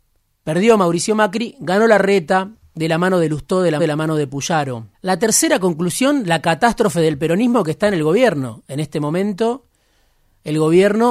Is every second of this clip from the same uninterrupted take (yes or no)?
no